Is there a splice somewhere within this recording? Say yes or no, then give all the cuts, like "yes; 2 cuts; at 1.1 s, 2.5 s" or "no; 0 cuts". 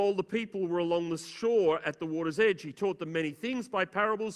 no; 0 cuts